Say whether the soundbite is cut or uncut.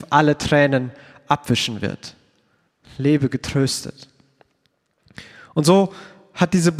uncut